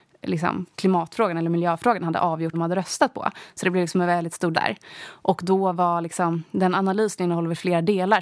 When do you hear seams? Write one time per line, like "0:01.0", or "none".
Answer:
0:02.5
0:04.5